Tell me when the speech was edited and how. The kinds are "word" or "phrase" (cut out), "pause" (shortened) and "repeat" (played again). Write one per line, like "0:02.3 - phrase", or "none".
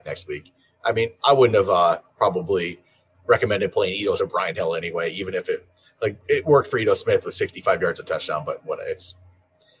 0:04.2 - word